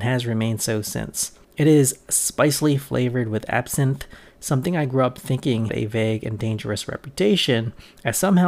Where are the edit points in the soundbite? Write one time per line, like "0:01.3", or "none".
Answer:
0:01.4
0:05.7